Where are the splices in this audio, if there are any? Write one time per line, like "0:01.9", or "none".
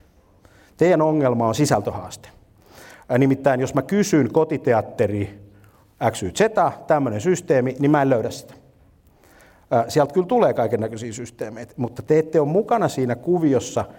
none